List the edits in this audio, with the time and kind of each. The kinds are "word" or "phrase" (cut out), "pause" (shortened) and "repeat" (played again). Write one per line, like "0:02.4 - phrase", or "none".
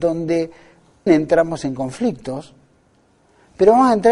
0:01.1 - word